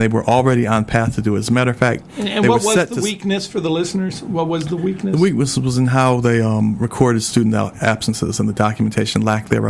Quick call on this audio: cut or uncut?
uncut